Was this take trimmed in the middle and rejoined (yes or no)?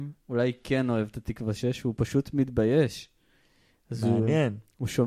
no